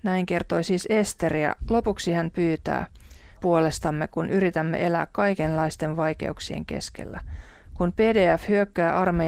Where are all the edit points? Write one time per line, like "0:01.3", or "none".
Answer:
0:03.4